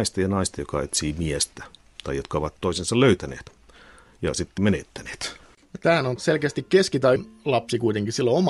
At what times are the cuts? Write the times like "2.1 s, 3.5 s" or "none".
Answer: 2.6 s, 4.6 s, 6.2 s, 7.2 s